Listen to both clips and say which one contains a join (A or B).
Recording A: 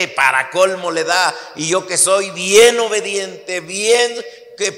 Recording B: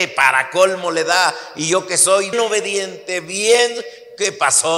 B